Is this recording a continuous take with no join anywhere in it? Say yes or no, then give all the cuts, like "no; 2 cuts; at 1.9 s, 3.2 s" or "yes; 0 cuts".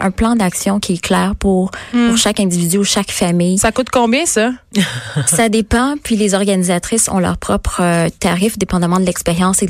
yes; 0 cuts